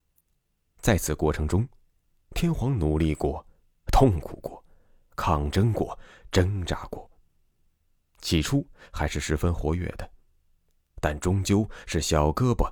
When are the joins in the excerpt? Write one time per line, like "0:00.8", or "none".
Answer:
none